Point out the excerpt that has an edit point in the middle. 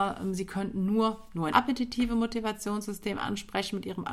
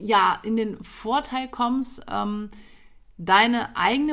first; 1 cut; at 1.5 s

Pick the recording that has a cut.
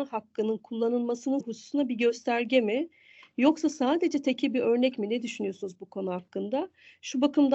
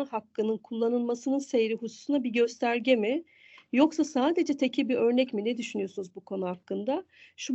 first; 1 cut; at 1.4 s

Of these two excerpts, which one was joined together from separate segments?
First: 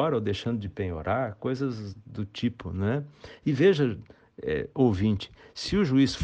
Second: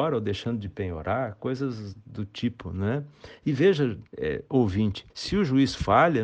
second; 2 cuts; at 4.1 s, 5.1 s

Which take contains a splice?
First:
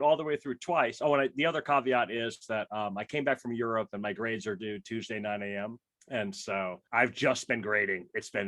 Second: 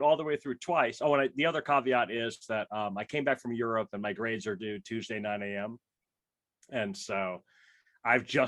first; 2 cuts; at 6.0 s, 6.9 s

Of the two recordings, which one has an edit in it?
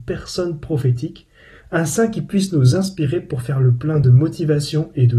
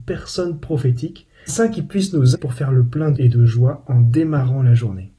second; 3 cuts; at 1.5 s, 2.3 s, 3.1 s

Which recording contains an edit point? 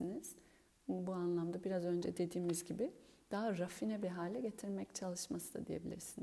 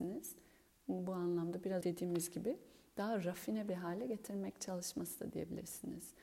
second; 1 cut; at 1.8 s

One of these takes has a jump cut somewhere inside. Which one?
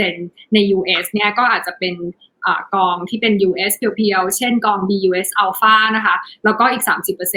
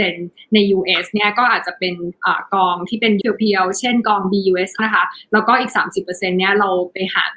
second; 3 cuts; at 2.2 s, 3.2 s, 4.8 s

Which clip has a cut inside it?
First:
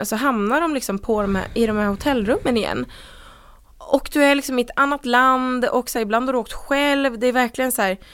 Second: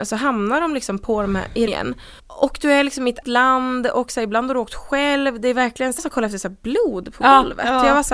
second; 4 cuts; at 1.7 s, 2.2 s, 3.2 s, 6.0 s

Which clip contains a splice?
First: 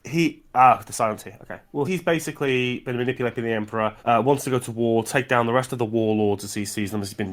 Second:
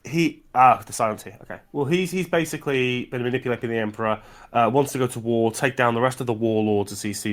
first; 2 cuts; at 1.8 s, 4.0 s

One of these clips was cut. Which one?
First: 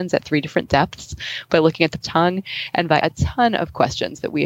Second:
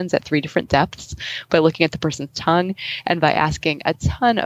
first; 2 cuts; at 2.0 s, 3.0 s

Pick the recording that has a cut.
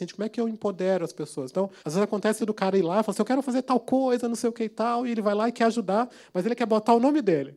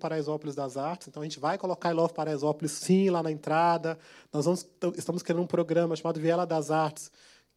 first; 2 cuts; at 1.8 s, 2.4 s

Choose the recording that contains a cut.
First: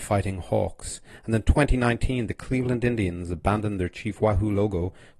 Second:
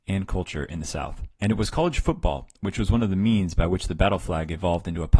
second; 1 cut; at 1.4 s

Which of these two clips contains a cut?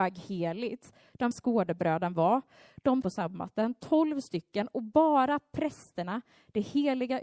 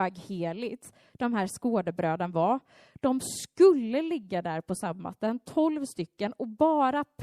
first; 2 cuts; at 1.3 s, 3.0 s

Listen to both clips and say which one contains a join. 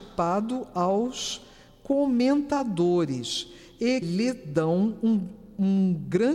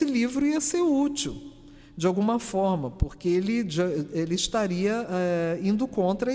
first; 1 cut; at 4.0 s

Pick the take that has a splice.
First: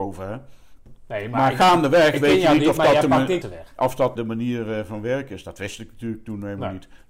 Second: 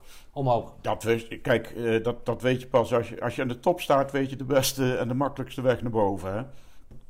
first; 2 cuts; at 3.4 s, 4.2 s

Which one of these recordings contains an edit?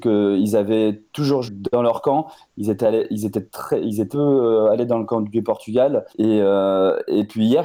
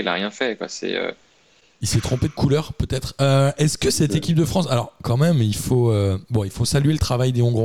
first; 3 cuts; at 1.4 s, 4.1 s, 6.1 s

